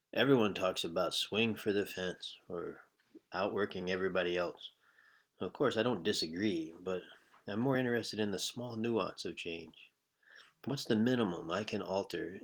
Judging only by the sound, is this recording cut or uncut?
uncut